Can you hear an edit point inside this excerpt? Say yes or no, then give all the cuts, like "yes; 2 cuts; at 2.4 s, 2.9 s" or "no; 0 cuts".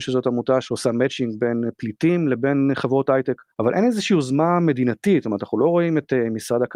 yes; 1 cut; at 3.5 s